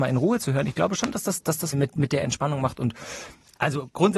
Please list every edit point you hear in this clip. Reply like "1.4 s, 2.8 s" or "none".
1.7 s